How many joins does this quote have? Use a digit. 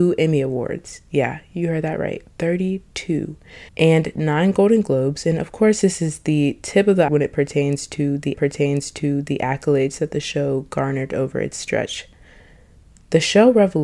3